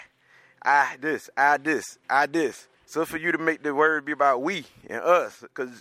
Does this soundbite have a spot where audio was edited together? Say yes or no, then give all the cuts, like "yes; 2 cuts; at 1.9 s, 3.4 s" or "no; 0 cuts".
yes; 2 cuts; at 2.0 s, 2.7 s